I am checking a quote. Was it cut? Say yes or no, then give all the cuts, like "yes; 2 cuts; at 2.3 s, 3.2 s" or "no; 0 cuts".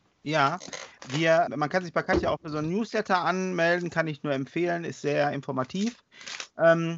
yes; 1 cut; at 1.5 s